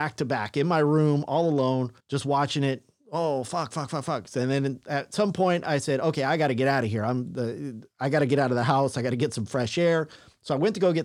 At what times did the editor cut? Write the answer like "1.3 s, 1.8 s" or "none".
2.0 s